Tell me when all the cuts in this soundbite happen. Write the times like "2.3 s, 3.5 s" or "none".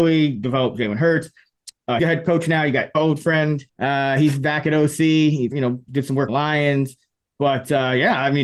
2.0 s, 2.9 s, 3.7 s, 5.5 s, 5.9 s, 6.3 s

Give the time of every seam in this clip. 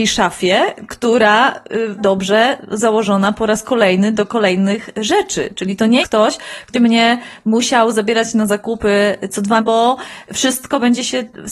2.0 s, 6.0 s, 6.7 s, 9.6 s

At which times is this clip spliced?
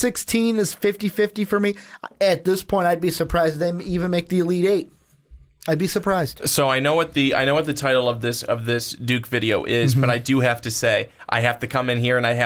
none

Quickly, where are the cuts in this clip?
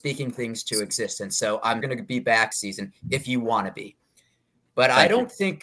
1.8 s, 2.5 s

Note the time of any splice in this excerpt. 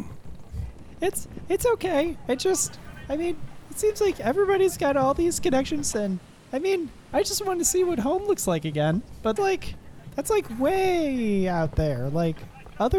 5.9 s, 9.4 s

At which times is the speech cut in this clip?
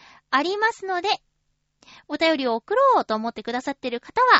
none

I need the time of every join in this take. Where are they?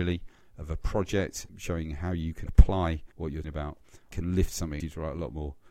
1.5 s, 2.5 s, 3.1 s, 3.4 s, 4.1 s, 4.8 s

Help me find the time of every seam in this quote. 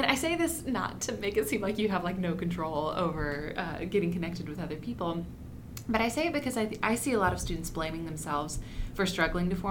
none

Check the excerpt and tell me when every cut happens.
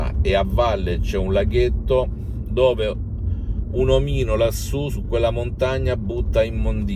none

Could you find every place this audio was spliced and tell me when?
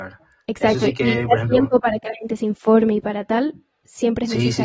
none

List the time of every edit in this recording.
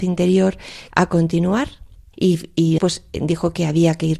0.9 s, 2.1 s, 2.8 s

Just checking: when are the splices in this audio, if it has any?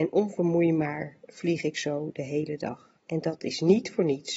3.0 s

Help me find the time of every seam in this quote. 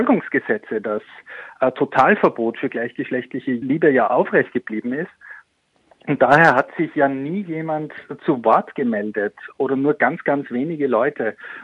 none

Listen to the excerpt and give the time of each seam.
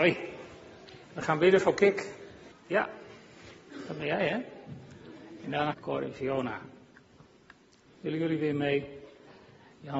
1.0 s, 2.5 s, 5.7 s

